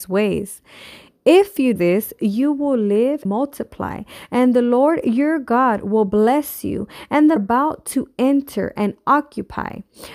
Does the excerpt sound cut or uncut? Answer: cut